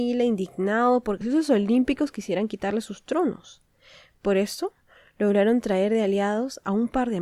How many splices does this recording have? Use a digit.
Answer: 1